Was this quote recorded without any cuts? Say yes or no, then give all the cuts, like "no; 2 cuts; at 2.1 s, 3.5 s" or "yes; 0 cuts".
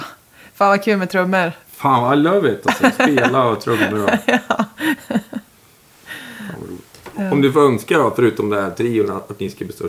yes; 0 cuts